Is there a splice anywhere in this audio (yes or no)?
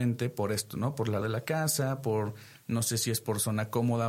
yes